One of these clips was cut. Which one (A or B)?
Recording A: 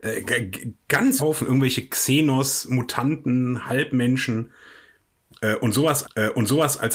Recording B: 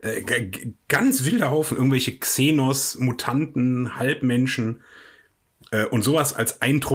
A